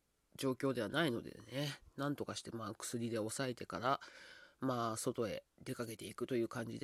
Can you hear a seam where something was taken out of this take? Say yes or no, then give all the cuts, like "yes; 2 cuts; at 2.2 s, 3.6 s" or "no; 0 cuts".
yes; 1 cut; at 5.5 s